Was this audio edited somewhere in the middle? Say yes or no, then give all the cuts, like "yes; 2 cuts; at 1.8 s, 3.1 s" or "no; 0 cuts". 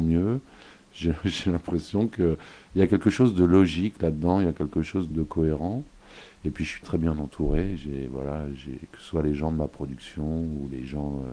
yes; 2 cuts; at 5.1 s, 6.8 s